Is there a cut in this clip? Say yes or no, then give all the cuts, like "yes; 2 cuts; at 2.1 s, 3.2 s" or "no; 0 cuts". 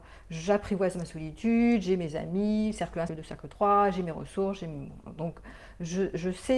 yes; 1 cut; at 3.1 s